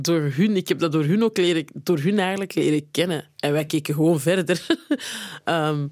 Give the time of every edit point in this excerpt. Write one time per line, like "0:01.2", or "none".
none